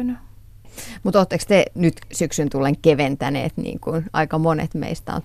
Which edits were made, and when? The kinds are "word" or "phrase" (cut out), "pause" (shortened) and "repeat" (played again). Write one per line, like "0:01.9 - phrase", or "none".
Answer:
none